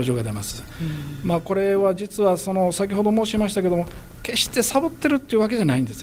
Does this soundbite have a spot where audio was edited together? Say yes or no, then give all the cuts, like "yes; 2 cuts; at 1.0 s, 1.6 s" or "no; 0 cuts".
no; 0 cuts